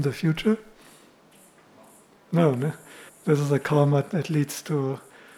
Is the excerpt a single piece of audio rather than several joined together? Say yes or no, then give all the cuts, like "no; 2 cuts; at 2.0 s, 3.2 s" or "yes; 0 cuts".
no; 1 cut; at 3.1 s